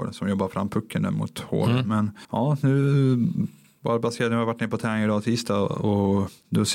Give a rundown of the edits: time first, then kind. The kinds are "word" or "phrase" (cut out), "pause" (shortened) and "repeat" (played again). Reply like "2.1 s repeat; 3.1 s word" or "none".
none